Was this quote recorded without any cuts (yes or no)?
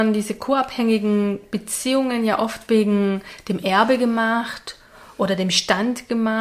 yes